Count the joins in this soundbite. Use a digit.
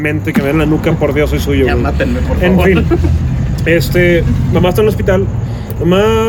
0